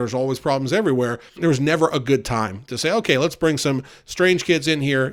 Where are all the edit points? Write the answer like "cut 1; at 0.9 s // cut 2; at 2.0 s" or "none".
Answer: cut 1; at 1.3 s